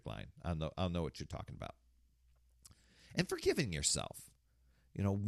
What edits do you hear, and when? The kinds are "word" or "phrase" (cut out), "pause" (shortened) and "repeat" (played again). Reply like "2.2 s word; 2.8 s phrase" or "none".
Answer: none